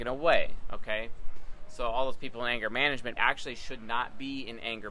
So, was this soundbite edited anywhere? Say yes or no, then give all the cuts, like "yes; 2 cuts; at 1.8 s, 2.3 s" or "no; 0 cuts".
yes; 1 cut; at 3.2 s